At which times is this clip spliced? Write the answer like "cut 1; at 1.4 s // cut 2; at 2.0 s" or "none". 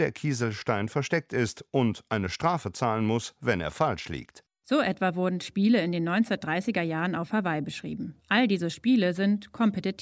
cut 1; at 8.2 s